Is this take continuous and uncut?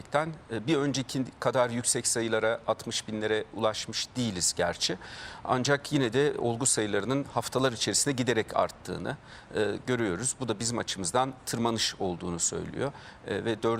yes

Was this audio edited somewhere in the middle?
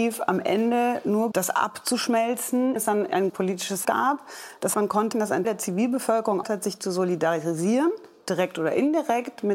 yes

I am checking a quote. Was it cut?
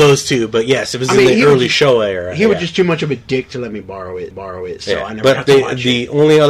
yes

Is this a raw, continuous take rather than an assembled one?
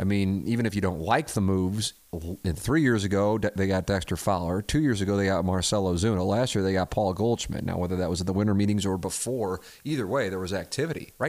yes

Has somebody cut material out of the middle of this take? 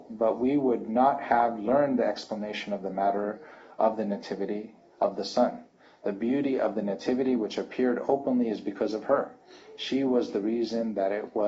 no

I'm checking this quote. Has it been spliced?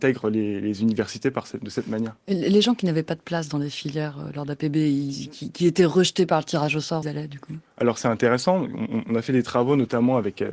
yes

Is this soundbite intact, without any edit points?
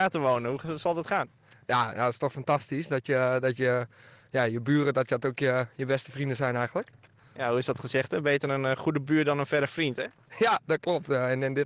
yes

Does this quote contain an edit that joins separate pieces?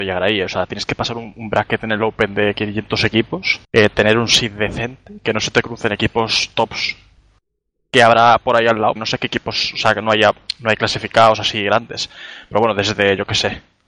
yes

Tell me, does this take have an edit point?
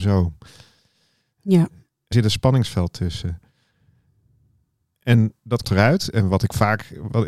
yes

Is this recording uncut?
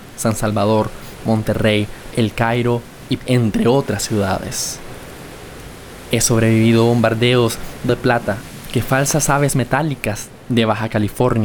no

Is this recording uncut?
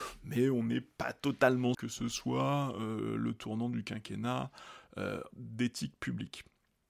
no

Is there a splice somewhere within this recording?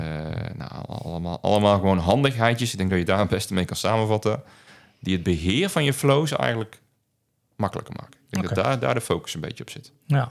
no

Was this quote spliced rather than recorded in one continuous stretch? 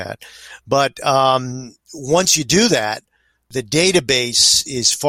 no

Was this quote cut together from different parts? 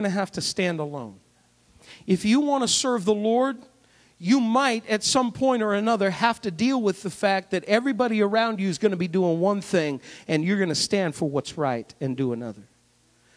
no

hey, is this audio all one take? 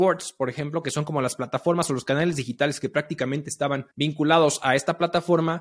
no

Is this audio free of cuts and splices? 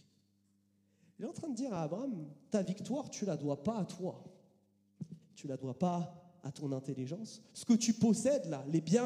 yes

